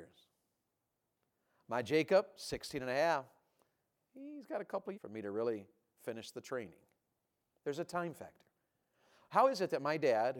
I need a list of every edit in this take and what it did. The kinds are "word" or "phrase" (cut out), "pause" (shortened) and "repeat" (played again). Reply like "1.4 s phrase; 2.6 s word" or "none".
4.9 s phrase